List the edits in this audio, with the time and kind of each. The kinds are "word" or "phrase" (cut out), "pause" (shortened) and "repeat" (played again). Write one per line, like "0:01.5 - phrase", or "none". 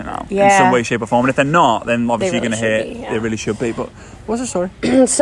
none